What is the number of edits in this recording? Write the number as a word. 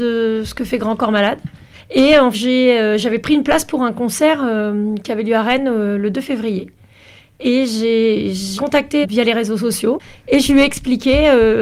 three